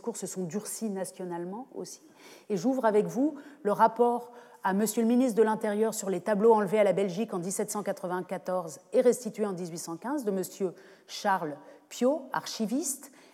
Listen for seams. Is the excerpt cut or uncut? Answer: uncut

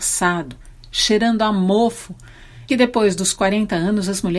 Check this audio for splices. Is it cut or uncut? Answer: cut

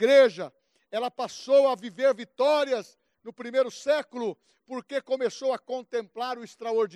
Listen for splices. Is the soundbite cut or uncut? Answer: uncut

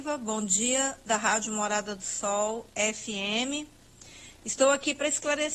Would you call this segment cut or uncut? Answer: cut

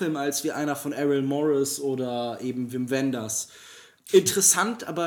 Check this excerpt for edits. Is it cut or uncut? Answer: uncut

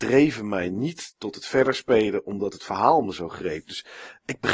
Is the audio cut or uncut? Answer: uncut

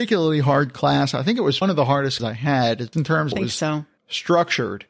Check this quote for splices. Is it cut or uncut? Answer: cut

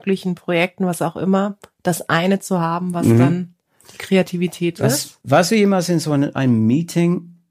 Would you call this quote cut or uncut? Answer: uncut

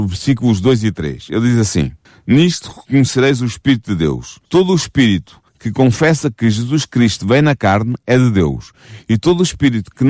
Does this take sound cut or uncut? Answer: cut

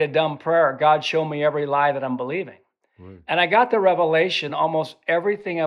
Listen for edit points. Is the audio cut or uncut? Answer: uncut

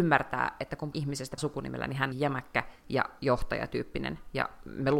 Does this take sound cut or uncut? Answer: cut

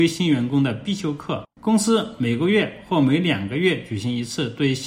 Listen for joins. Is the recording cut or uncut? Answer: cut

